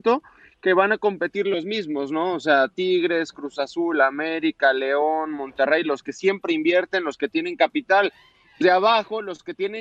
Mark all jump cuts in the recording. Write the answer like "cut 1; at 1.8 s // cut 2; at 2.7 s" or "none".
cut 1; at 8.6 s